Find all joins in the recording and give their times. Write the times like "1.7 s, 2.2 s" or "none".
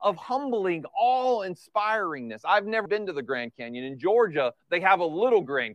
2.9 s, 4.6 s